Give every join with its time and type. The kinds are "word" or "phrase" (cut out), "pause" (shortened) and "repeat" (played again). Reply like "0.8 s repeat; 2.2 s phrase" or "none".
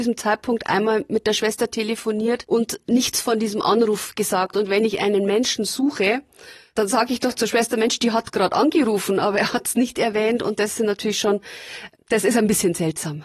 none